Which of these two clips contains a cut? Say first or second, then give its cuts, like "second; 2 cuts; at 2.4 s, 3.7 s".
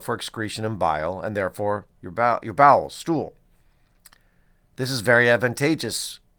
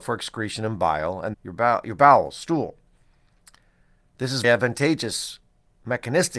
second; 2 cuts; at 1.3 s, 4.4 s